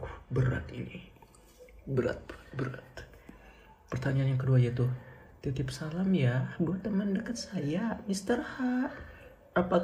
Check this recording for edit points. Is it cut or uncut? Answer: uncut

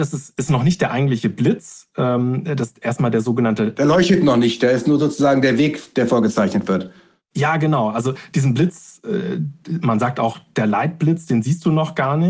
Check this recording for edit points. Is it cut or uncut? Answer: uncut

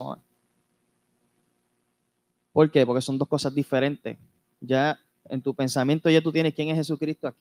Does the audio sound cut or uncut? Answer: uncut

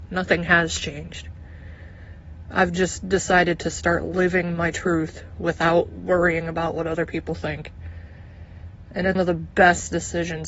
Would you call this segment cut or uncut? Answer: cut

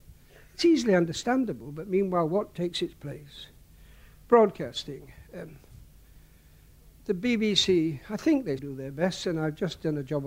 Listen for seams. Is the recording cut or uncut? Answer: cut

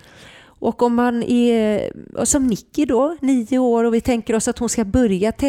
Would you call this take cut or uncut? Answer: cut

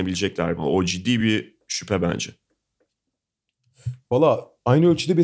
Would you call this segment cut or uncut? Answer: uncut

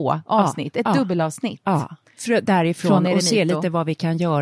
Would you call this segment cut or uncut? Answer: uncut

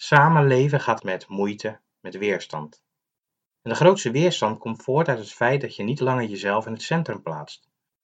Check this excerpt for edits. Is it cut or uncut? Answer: cut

